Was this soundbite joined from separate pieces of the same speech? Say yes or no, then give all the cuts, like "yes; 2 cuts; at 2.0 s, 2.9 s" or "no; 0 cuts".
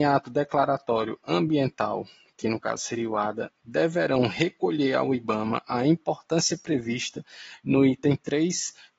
no; 0 cuts